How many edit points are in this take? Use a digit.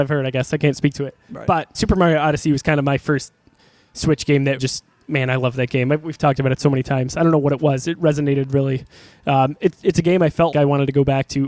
3